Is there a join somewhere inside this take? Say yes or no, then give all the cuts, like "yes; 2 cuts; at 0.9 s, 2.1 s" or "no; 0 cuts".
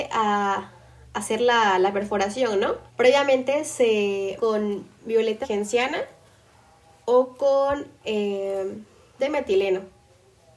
yes; 4 cuts; at 2.9 s, 4.4 s, 5.4 s, 9.2 s